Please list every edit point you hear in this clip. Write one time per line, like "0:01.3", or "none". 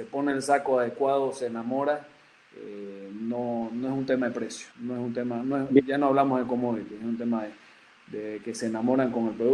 0:04.7